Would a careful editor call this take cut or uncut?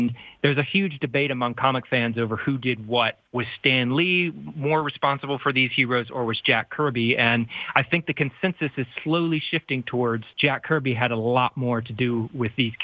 cut